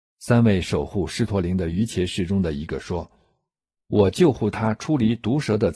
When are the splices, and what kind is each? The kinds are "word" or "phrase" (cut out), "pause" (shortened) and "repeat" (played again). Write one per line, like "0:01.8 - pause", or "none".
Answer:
none